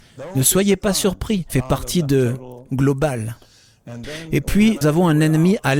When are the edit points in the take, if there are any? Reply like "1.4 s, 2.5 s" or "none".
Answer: 1.5 s, 2.7 s, 4.8 s